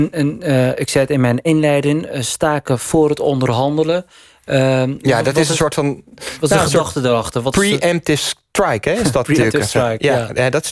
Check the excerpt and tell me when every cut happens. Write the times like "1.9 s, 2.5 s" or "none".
none